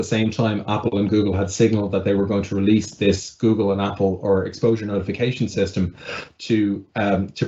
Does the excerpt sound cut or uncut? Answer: uncut